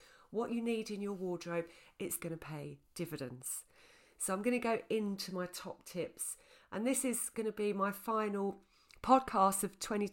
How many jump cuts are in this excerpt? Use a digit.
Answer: 1